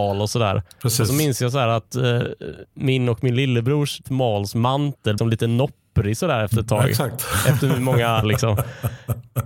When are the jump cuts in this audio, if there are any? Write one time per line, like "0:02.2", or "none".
0:04.0
0:05.2
0:08.2